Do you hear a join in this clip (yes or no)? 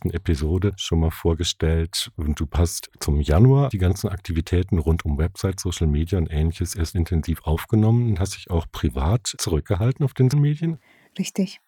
yes